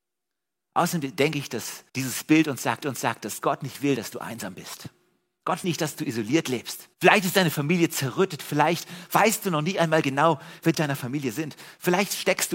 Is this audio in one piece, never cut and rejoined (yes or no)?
no